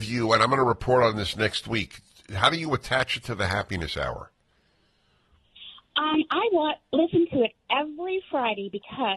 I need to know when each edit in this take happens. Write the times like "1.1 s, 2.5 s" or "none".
none